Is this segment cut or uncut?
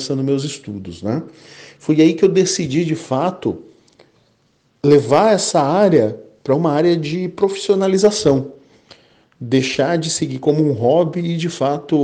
uncut